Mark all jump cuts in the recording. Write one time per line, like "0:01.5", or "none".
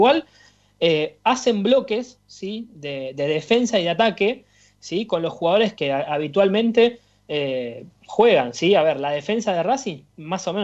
0:05.7